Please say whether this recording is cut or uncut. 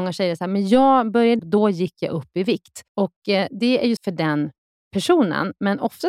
cut